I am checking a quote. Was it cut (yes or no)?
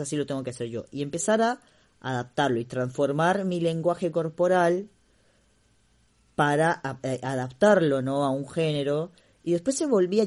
no